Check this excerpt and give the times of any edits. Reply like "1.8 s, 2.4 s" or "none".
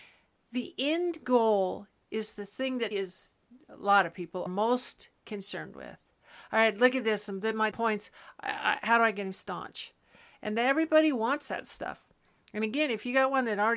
2.9 s, 4.5 s, 7.7 s